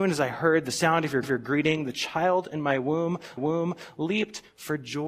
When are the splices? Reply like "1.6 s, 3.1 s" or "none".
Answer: 1.2 s, 3.4 s